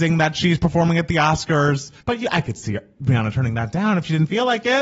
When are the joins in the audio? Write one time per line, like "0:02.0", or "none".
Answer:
0:02.0